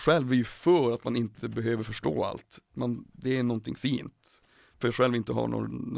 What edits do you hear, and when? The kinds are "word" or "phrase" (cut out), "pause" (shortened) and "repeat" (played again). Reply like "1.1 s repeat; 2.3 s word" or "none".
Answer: 4.8 s word